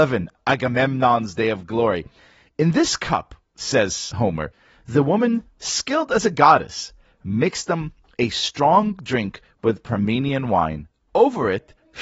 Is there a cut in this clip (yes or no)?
no